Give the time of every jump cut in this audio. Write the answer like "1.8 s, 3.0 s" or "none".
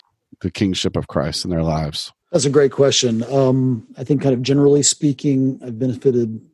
2.2 s